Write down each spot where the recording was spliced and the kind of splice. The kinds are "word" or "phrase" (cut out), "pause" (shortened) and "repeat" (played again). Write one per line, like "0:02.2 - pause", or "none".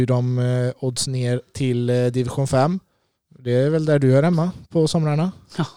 none